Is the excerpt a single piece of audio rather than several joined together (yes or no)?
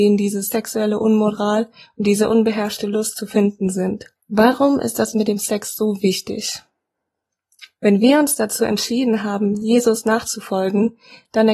no